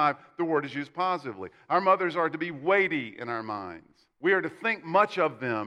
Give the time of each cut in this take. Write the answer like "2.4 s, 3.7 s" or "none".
4.1 s